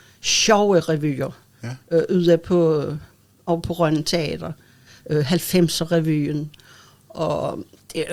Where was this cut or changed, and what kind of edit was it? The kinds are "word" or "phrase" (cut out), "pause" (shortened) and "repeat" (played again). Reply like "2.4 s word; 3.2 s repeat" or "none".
none